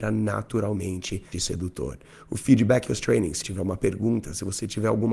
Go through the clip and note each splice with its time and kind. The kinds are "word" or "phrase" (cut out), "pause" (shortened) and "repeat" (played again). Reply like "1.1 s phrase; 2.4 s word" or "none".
1.3 s word; 2.9 s word; 3.4 s word